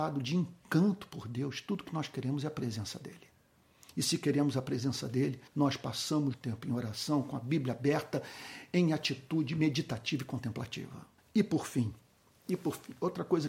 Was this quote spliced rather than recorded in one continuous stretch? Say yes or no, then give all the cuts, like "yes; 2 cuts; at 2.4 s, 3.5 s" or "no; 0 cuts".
yes; 3 cuts; at 5.5 s, 6.3 s, 11.2 s